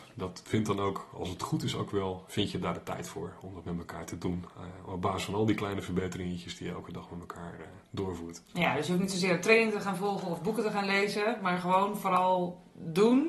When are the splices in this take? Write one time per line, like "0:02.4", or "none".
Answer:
none